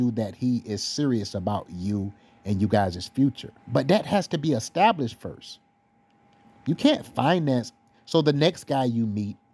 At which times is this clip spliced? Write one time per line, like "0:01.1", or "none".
0:03.6